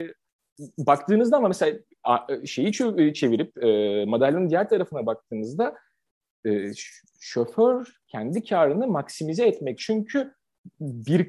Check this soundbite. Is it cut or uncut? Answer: cut